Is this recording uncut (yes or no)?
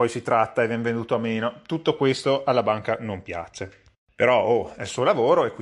yes